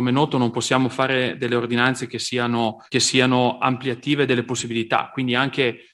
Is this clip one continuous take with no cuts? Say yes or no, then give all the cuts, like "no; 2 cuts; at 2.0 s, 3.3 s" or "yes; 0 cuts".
no; 1 cut; at 2.9 s